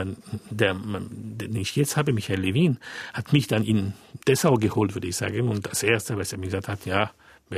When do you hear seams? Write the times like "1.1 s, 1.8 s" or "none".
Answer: 4.2 s